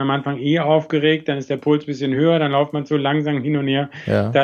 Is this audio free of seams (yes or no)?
yes